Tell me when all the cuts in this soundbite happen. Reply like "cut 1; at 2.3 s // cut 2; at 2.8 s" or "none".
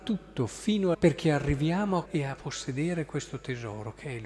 cut 1; at 0.9 s // cut 2; at 2.0 s